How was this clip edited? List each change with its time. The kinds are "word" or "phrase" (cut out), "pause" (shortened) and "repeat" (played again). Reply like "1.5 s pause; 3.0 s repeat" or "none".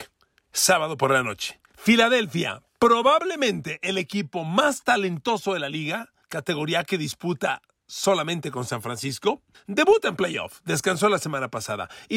1.7 s pause; 6.2 s pause; 9.5 s pause